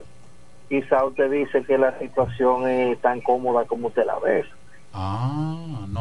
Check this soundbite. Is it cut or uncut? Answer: uncut